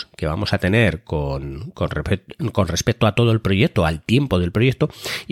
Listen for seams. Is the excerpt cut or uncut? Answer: uncut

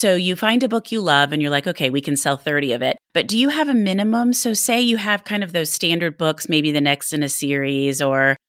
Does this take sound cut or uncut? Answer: cut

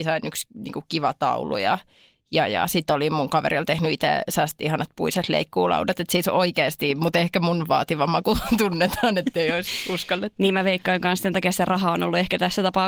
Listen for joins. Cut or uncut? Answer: uncut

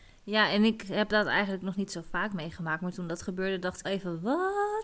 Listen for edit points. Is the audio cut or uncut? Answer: cut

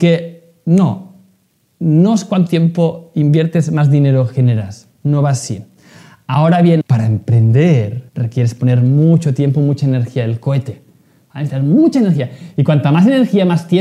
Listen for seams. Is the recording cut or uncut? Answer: cut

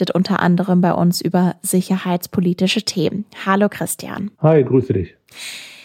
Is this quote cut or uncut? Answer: cut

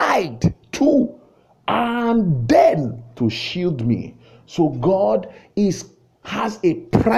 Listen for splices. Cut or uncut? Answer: uncut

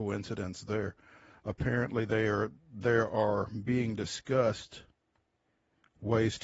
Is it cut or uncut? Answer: uncut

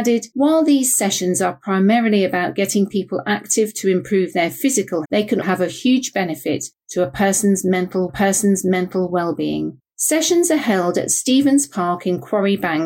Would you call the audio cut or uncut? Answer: cut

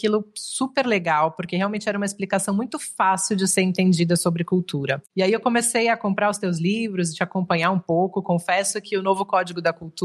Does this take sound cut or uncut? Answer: cut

